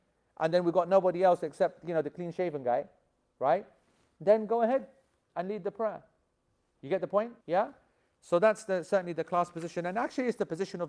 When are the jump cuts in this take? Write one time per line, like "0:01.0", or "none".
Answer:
0:07.4

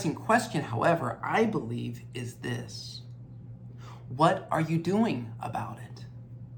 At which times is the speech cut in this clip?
none

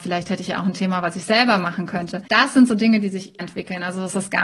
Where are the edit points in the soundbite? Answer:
0:02.2
0:03.4

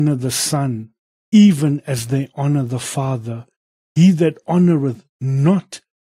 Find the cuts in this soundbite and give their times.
none

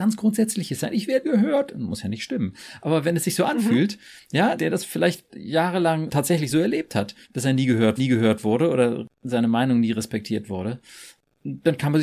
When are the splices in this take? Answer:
0:01.2
0:04.6
0:06.1
0:07.2
0:08.0

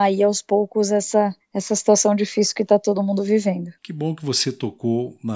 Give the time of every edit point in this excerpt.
0:01.4
0:03.8

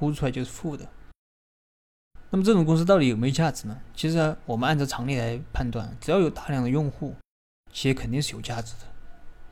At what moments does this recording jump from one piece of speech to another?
none

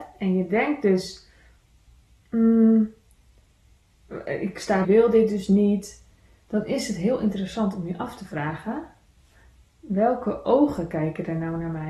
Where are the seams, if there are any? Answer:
0:04.8

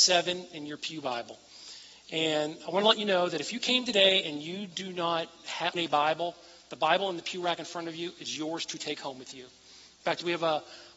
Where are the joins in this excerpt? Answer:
0:05.7

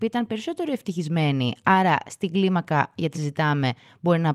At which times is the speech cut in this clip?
0:03.1

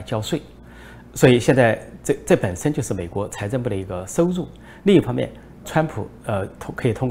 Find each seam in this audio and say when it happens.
0:05.6

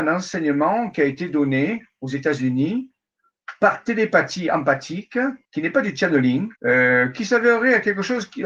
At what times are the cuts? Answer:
0:05.4
0:06.6

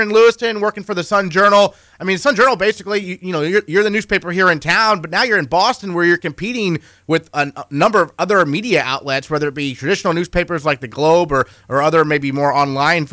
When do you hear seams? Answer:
none

